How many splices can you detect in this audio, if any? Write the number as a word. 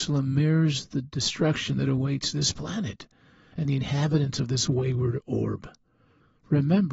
zero